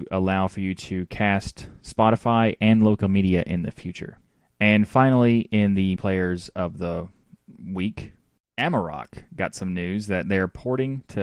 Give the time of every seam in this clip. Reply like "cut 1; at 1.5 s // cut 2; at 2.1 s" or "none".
cut 1; at 6.0 s

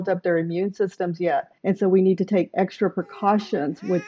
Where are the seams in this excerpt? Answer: cut 1; at 1.6 s

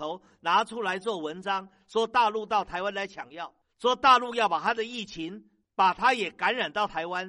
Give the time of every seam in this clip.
none

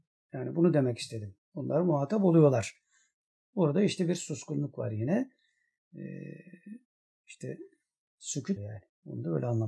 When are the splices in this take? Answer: cut 1; at 8.6 s

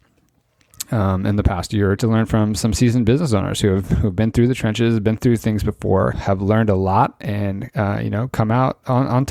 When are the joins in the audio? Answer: cut 1; at 2.0 s // cut 2; at 6.1 s

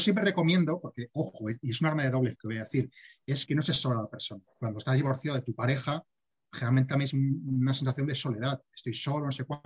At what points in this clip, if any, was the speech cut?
cut 1; at 2.4 s // cut 2; at 3.5 s // cut 3; at 7.1 s

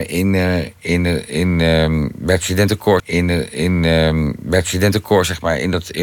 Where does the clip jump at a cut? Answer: cut 1; at 3.0 s

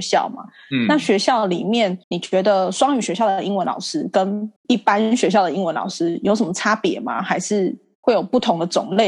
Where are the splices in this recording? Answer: cut 1; at 2.0 s // cut 2; at 4.6 s

